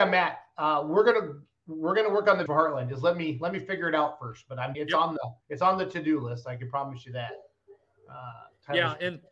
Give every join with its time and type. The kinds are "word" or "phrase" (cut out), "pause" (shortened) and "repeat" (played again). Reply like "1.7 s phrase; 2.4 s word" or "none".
2.5 s phrase; 4.7 s word; 5.4 s pause